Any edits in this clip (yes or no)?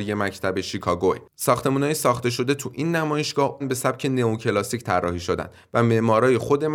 yes